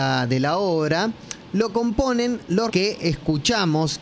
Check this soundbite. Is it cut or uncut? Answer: cut